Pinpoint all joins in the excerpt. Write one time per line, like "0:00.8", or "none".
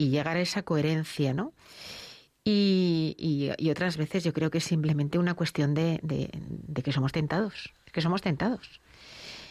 0:07.8